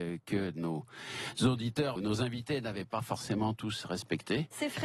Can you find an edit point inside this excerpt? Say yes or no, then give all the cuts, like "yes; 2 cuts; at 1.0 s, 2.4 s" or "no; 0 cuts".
yes; 1 cut; at 2.0 s